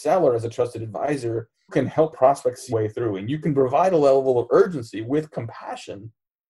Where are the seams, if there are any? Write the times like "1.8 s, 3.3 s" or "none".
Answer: 1.7 s, 2.1 s, 2.7 s